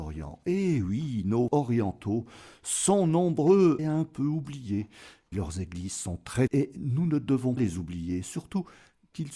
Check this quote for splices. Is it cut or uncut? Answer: cut